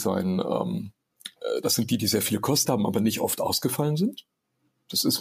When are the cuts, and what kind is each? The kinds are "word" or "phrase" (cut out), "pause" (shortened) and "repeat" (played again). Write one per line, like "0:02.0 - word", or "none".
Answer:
0:02.6 - word